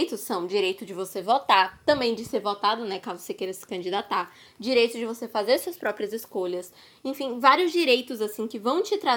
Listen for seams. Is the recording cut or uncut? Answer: uncut